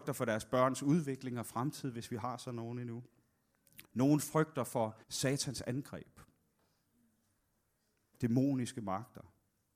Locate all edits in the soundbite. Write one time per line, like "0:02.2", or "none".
0:03.8
0:05.0